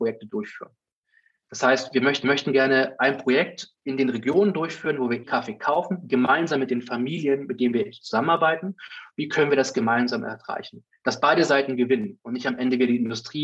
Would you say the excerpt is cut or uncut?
cut